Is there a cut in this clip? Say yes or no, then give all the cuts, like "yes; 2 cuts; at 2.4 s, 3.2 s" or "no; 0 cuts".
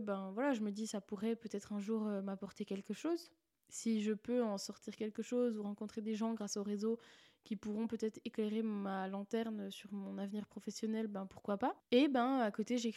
no; 0 cuts